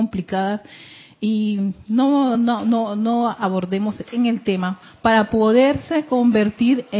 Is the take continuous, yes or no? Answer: yes